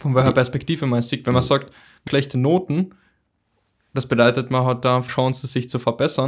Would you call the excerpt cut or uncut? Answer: cut